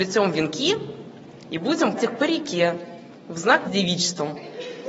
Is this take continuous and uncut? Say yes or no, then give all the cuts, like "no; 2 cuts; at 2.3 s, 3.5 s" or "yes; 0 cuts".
no; 2 cuts; at 2.0 s, 3.6 s